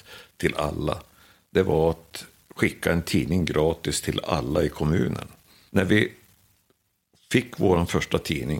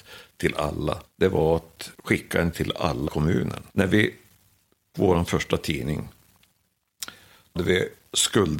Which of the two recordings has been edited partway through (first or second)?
second